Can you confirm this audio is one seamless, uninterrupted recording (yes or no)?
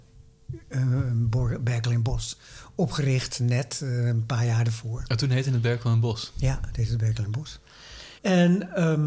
no